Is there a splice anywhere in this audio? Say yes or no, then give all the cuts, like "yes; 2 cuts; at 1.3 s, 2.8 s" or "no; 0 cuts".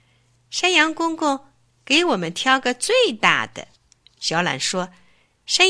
yes; 1 cut; at 3.8 s